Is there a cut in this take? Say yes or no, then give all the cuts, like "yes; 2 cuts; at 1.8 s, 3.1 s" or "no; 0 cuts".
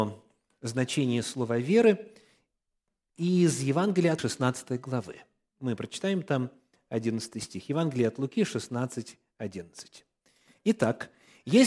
yes; 1 cut; at 4.2 s